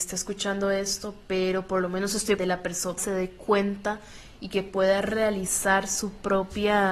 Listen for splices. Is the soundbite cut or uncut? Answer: cut